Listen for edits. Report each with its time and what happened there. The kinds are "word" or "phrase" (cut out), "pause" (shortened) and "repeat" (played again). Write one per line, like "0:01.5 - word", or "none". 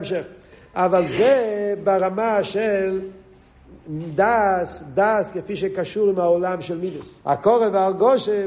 0:07.2 - pause